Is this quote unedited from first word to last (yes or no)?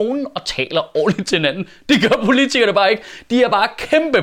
yes